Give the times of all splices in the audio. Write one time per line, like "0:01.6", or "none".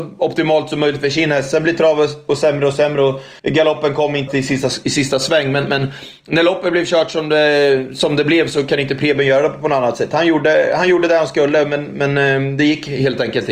0:03.4
0:04.3